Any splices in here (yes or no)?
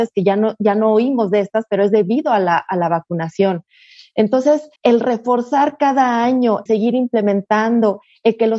yes